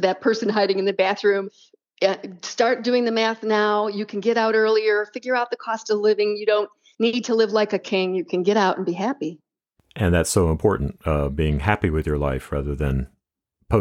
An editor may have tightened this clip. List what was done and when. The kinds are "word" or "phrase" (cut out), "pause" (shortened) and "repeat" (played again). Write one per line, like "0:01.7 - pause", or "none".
none